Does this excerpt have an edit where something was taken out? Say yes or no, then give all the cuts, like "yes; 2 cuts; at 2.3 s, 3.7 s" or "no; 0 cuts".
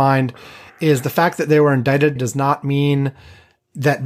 yes; 1 cut; at 2.2 s